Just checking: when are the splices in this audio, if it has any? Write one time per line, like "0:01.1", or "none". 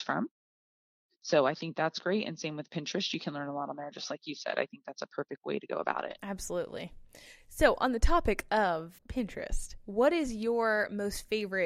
0:09.0